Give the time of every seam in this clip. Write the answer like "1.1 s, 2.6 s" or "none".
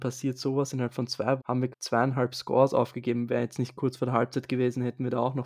1.4 s, 1.7 s